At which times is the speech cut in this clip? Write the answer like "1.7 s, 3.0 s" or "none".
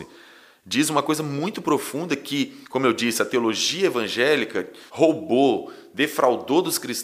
2.6 s, 4.9 s